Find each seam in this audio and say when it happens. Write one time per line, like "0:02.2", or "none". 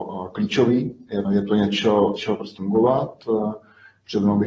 0:01.2
0:02.2
0:02.6

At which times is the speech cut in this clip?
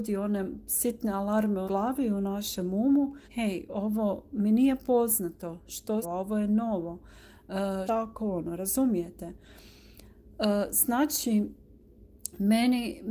0:01.7
0:03.2
0:06.0
0:07.9

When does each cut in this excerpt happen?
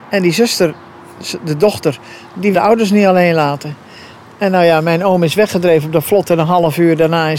0:02.5

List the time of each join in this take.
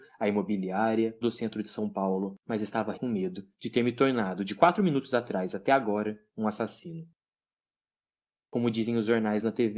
0:01.2
0:02.9

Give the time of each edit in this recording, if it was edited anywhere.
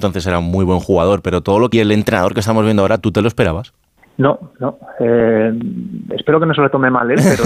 0:01.7
0:04.0

